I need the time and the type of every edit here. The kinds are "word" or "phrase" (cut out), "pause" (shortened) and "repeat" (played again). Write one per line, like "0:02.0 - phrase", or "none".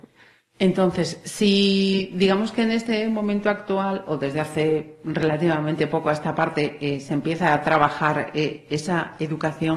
none